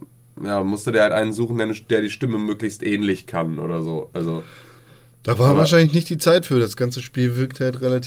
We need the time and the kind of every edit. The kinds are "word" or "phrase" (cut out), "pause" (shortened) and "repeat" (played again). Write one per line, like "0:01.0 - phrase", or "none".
none